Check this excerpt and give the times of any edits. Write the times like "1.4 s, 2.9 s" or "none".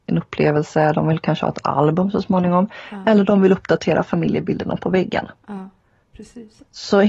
none